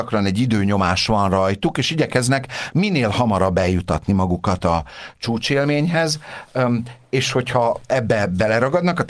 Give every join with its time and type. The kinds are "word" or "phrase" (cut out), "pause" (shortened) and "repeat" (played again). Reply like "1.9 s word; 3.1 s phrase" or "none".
none